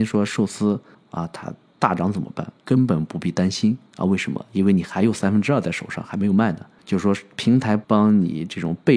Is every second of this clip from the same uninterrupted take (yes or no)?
no